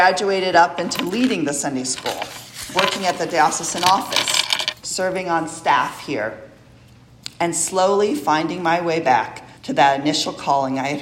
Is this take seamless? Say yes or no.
no